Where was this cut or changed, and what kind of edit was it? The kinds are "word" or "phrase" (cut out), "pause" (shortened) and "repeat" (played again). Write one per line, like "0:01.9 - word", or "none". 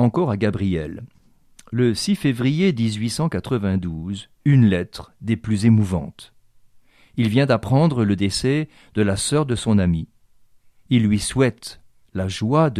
none